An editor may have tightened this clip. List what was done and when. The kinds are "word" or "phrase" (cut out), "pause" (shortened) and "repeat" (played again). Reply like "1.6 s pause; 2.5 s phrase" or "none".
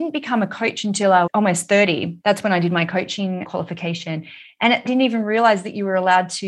1.3 s word; 2.2 s pause; 3.4 s word; 4.9 s phrase